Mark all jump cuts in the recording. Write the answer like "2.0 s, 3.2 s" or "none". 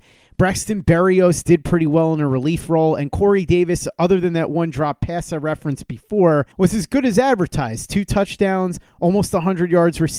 6.5 s